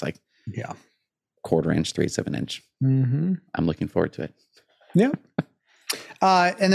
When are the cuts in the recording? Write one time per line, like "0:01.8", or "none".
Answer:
none